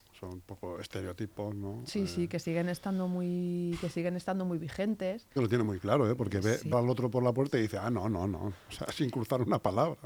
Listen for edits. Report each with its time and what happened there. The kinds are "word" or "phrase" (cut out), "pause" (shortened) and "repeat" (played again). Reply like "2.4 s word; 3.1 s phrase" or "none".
5.4 s phrase; 6.7 s word